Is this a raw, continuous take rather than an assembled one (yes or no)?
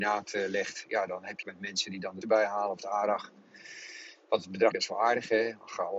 no